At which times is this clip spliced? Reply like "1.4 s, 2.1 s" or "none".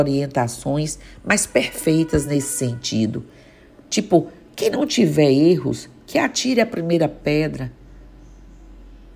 none